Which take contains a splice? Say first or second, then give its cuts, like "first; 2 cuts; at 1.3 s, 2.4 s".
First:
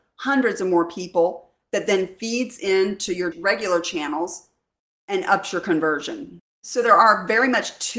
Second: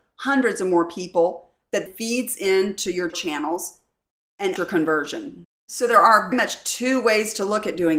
second; 4 cuts; at 1.9 s, 3.1 s, 4.6 s, 6.3 s